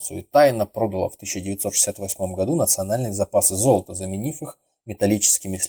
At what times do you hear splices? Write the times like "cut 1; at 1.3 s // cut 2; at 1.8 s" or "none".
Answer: none